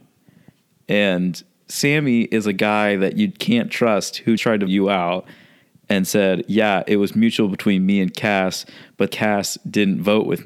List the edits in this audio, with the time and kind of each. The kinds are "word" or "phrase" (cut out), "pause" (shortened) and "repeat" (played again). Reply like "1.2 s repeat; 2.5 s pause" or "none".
4.4 s word; 4.7 s word; 9.1 s word